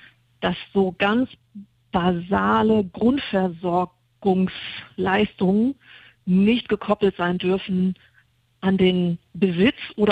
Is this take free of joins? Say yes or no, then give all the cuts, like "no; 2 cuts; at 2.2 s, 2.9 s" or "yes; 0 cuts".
yes; 0 cuts